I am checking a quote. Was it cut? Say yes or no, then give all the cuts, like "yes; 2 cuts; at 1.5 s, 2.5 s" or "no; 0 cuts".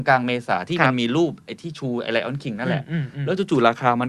no; 0 cuts